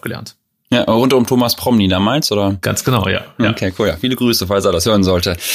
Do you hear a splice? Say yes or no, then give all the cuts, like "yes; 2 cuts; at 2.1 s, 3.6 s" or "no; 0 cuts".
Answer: no; 0 cuts